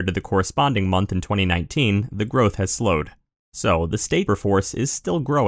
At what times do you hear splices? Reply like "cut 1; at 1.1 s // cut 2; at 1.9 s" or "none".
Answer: cut 1; at 4.3 s